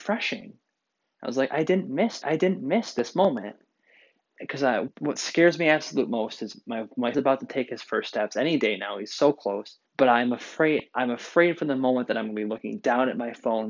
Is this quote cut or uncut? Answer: cut